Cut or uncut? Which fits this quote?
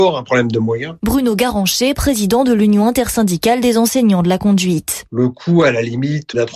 uncut